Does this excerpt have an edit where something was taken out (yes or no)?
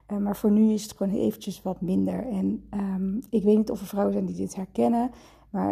no